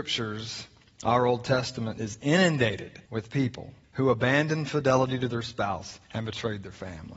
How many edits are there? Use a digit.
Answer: 3